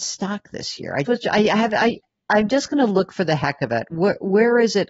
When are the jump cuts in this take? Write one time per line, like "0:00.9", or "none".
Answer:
0:01.1